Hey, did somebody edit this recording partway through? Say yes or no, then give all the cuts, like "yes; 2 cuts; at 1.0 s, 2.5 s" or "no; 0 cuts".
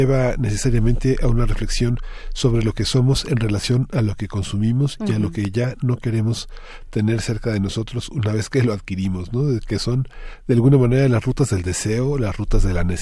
no; 0 cuts